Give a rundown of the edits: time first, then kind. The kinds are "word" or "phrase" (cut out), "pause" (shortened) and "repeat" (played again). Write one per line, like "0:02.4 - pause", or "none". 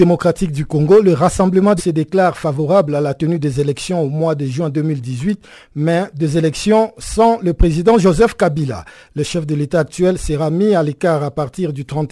0:01.8 - word